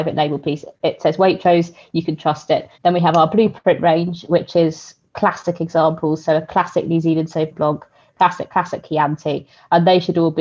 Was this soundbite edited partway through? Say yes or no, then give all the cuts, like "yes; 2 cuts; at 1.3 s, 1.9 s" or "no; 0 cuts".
yes; 3 cuts; at 2.7 s, 7.5 s, 8.5 s